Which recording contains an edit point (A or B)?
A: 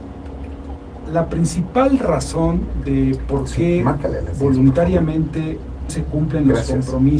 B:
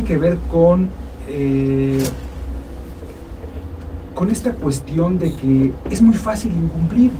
A